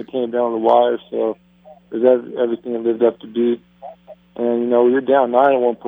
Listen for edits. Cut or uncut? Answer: uncut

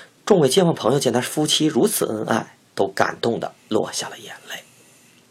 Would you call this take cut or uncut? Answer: cut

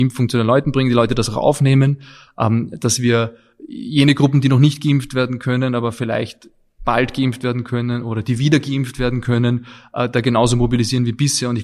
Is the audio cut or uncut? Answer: uncut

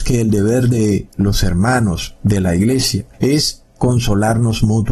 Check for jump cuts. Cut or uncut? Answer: cut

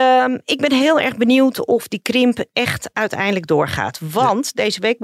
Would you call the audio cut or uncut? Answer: uncut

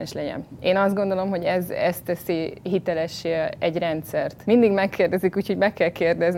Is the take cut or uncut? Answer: uncut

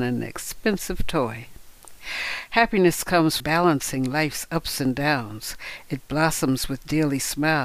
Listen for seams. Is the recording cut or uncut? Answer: cut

